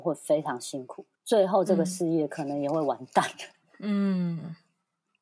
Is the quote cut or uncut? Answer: cut